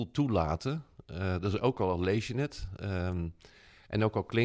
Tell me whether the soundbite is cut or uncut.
uncut